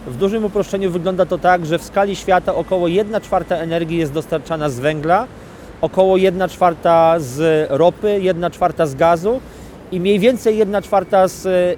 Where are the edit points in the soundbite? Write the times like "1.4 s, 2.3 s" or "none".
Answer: none